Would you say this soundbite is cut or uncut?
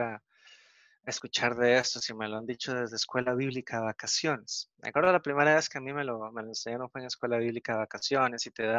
uncut